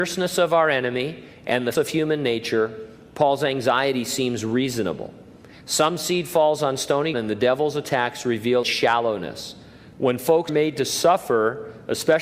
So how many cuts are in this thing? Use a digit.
4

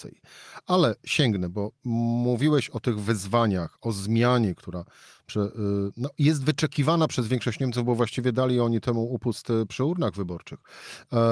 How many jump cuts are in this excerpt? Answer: 0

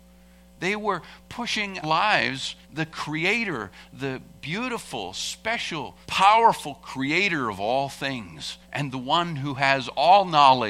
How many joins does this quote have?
4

